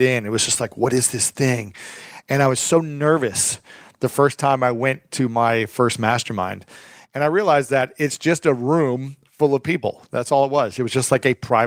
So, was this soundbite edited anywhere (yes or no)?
no